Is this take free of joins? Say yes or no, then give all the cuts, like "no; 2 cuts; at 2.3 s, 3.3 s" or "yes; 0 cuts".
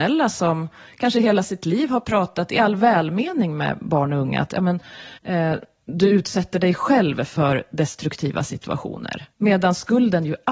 no; 2 cuts; at 5.2 s, 9.3 s